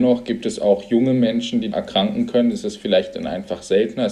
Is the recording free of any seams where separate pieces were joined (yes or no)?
no